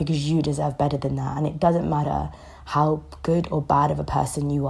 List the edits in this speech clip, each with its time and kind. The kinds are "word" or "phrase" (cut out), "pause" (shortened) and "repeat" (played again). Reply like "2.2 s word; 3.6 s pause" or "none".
none